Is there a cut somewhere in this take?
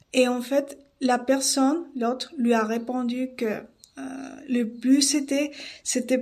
no; 0 cuts

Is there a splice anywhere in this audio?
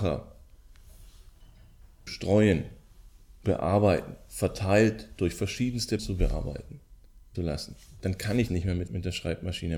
yes; 6 cuts; at 2.1 s, 3.4 s, 6.0 s, 7.3 s, 8.5 s, 8.9 s

